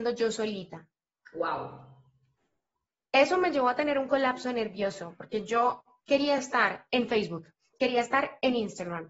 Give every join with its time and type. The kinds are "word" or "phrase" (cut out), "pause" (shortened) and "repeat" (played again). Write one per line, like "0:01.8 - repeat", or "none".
none